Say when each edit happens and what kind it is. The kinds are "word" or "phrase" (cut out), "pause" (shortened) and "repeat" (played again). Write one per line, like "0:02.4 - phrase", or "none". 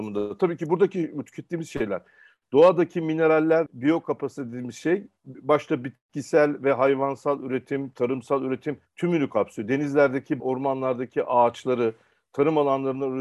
0:03.7 - word
0:08.9 - pause
0:10.4 - word